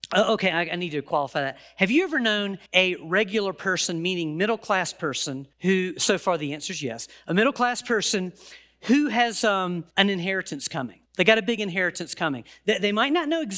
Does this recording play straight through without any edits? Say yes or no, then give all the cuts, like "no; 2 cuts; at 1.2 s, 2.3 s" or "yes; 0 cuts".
no; 4 cuts; at 2.7 s, 5.5 s, 9.9 s, 11.1 s